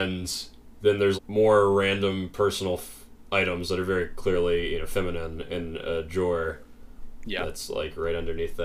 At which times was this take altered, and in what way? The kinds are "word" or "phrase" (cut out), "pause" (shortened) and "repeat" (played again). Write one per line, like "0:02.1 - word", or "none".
0:01.1 - word